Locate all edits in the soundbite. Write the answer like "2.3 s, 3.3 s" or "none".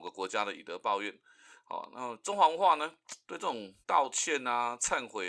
3.2 s, 3.8 s